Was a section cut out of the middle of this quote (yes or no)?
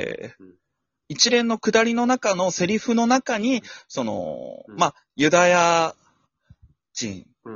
no